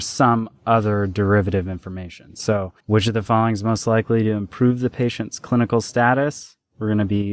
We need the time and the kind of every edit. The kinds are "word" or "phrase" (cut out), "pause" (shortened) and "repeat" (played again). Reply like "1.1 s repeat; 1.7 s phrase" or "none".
2.8 s pause